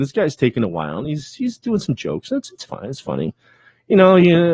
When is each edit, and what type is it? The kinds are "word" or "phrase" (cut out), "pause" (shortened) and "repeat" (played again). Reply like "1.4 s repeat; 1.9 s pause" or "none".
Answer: none

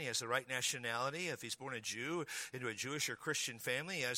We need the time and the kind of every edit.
none

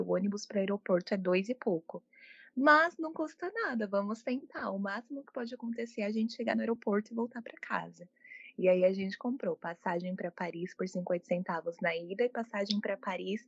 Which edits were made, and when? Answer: none

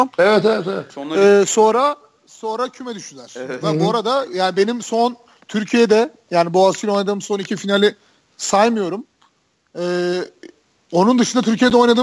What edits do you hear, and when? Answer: none

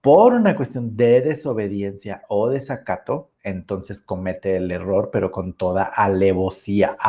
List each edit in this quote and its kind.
3.3 s pause

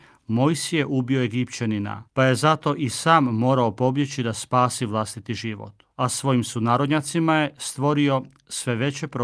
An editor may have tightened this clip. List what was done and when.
2.1 s pause; 5.9 s pause

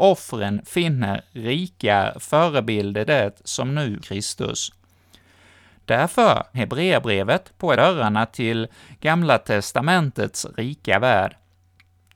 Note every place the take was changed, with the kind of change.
3.1 s word; 4.0 s phrase; 6.5 s word; 7.8 s phrase

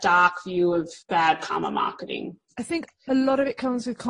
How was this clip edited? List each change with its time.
1.0 s pause; 2.4 s pause

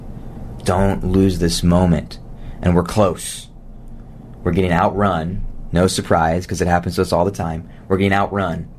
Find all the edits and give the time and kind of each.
none

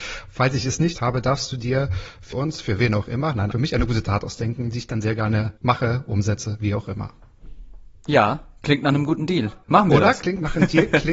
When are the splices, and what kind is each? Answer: 0.9 s word; 2.3 s phrase; 3.5 s word; 5.6 s pause; 9.6 s pause

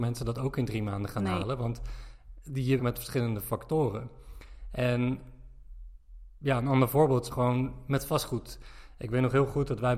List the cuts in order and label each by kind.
2.8 s phrase; 7.3 s word

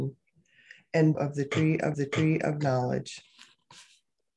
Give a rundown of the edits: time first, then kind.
1.1 s phrase; 1.9 s repeat

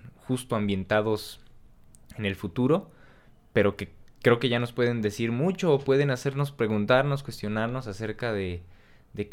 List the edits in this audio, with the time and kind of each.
none

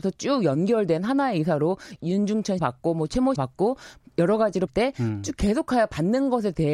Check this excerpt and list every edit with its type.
2.0 s word; 2.6 s word; 3.4 s word; 4.7 s word

